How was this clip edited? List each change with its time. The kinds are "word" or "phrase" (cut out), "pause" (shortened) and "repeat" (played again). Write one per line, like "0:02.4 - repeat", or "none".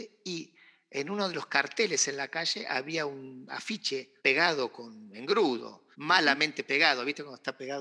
0:04.2 - pause
0:05.9 - pause